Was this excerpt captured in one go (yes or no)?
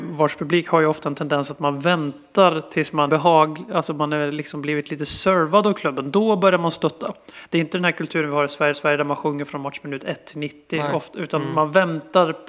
no